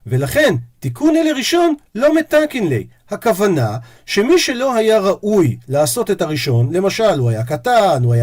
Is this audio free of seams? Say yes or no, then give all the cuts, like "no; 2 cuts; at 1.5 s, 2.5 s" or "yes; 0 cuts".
yes; 0 cuts